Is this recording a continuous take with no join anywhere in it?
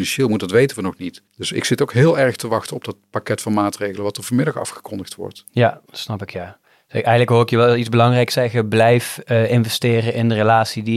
no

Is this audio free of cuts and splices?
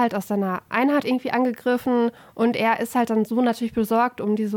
no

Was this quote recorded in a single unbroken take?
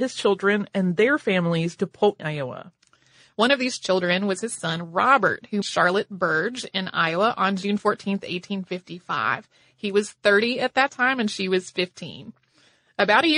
no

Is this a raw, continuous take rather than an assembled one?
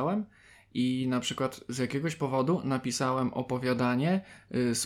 yes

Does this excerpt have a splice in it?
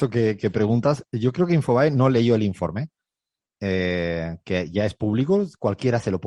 no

